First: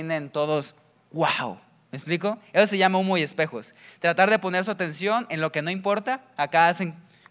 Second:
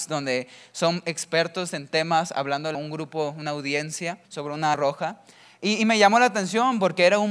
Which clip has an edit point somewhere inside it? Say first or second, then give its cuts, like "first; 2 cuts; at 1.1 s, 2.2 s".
second; 3 cuts; at 2.7 s, 4.3 s, 4.7 s